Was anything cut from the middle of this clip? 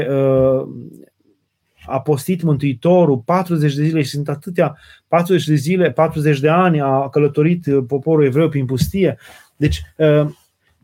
no; 0 cuts

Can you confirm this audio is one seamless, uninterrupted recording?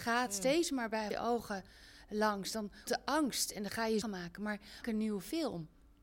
no; 4 cuts; at 1.1 s, 2.9 s, 4.0 s, 4.8 s

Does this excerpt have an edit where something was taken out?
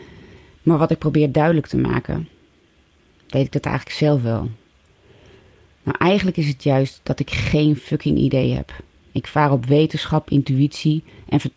no; 0 cuts

